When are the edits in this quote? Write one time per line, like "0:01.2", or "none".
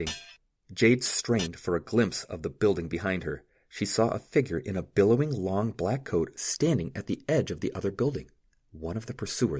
none